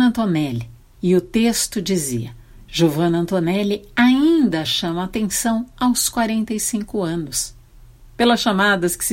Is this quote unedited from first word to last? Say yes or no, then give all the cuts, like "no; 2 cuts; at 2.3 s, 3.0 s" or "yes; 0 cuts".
yes; 0 cuts